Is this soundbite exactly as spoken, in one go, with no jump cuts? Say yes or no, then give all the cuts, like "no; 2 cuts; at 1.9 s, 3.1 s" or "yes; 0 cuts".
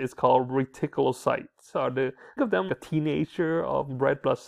no; 3 cuts; at 1.7 s, 2.4 s, 2.7 s